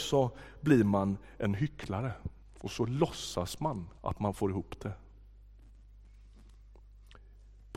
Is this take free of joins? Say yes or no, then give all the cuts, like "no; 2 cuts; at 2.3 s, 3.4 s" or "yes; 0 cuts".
no; 2 cuts; at 2.4 s, 4.0 s